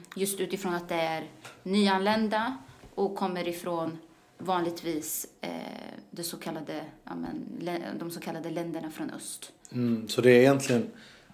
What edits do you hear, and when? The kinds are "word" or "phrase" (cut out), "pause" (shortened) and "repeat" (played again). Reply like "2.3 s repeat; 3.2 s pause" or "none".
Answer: none